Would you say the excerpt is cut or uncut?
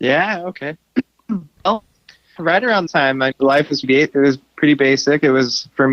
cut